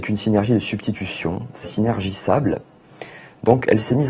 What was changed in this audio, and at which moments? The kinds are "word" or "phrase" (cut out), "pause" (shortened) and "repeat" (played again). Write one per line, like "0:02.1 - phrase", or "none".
0:01.6 - phrase